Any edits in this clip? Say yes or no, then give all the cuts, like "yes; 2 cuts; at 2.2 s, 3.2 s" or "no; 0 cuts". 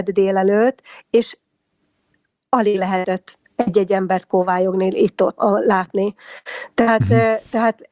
yes; 2 cuts; at 3.4 s, 5.4 s